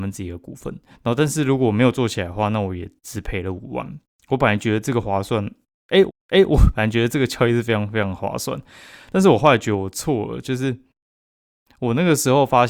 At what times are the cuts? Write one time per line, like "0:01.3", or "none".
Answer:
0:00.9
0:06.1